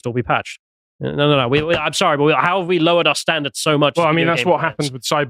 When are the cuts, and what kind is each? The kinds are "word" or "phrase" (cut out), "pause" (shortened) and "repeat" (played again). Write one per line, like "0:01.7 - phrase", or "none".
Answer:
none